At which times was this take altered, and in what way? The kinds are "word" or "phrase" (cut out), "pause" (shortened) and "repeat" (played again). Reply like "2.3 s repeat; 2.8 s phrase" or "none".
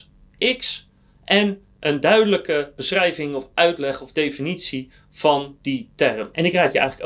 none